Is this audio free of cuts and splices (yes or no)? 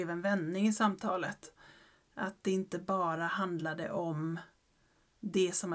yes